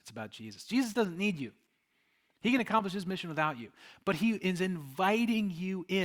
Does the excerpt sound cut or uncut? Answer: uncut